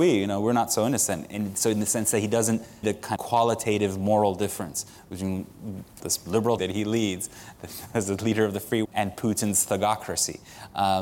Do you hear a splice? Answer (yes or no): yes